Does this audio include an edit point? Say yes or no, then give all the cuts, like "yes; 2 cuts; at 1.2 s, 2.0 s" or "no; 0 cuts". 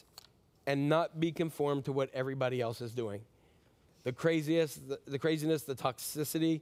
no; 0 cuts